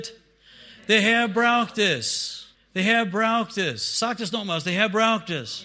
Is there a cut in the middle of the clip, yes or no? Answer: yes